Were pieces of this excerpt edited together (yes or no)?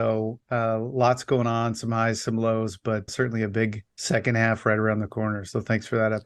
yes